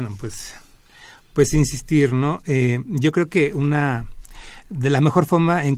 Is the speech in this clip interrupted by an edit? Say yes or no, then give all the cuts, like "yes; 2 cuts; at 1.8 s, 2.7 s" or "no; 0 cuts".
no; 0 cuts